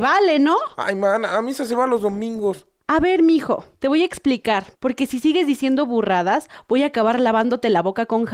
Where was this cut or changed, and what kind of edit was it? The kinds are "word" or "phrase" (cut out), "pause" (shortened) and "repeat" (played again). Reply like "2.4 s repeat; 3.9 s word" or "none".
3.7 s pause; 4.7 s pause